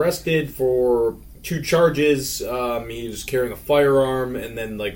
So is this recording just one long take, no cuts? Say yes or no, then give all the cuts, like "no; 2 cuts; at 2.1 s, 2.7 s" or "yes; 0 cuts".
yes; 0 cuts